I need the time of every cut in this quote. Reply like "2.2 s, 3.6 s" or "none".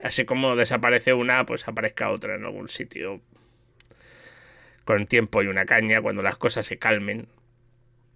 none

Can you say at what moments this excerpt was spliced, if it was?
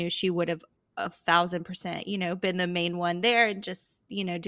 none

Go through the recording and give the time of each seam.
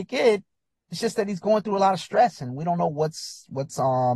none

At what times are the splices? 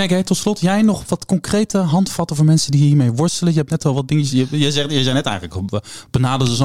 none

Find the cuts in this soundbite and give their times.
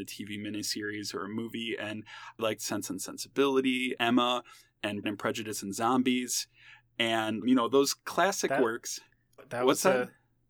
2.4 s, 4.0 s, 5.0 s, 7.4 s, 9.4 s

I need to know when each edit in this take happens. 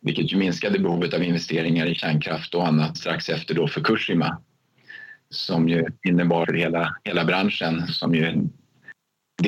2.9 s, 6.4 s, 7.9 s

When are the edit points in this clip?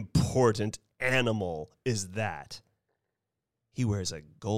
none

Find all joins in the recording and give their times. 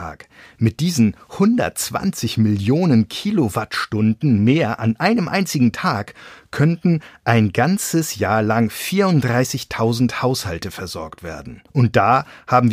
11.7 s

